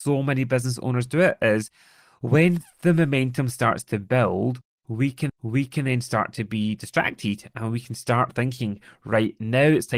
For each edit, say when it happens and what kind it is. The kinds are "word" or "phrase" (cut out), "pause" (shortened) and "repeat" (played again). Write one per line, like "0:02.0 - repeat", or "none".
0:05.3 - repeat